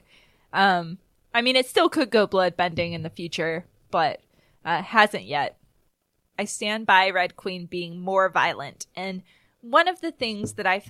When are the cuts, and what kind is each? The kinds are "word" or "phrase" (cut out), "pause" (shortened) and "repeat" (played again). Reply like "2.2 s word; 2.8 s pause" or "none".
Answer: none

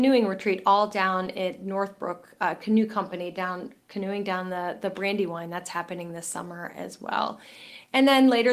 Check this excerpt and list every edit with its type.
none

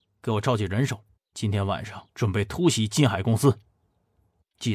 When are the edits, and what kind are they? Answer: 1.1 s pause; 2.1 s pause

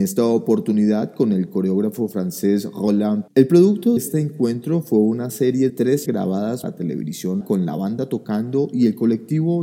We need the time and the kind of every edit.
3.3 s word; 4.0 s word; 5.7 s word; 6.1 s word; 6.6 s word; 7.4 s word

